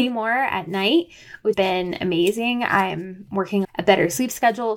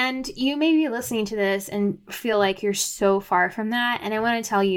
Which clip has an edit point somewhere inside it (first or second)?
first